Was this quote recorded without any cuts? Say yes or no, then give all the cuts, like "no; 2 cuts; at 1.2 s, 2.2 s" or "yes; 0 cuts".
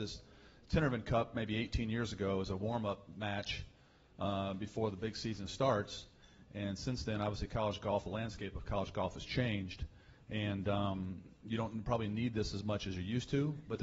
yes; 0 cuts